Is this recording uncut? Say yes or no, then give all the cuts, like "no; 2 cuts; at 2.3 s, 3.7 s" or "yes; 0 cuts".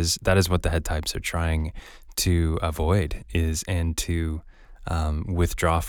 yes; 0 cuts